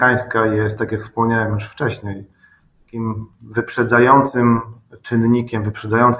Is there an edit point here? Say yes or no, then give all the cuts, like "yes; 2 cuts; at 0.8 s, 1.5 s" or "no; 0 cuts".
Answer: no; 0 cuts